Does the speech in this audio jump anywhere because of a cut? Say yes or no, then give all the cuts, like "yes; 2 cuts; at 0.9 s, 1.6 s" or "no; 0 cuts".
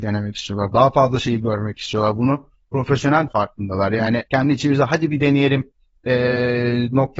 yes; 2 cuts; at 3.3 s, 4.3 s